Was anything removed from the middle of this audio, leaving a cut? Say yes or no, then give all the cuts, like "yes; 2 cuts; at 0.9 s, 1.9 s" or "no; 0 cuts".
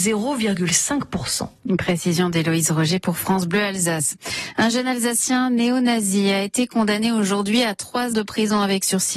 yes; 1 cut; at 8.1 s